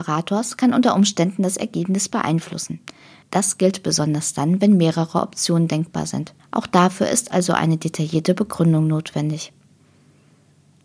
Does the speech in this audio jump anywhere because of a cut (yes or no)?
yes